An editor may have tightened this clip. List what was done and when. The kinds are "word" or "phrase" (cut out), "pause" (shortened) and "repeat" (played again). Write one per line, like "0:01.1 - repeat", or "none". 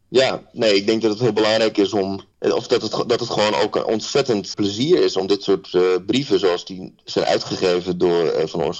0:02.3 - pause
0:04.5 - word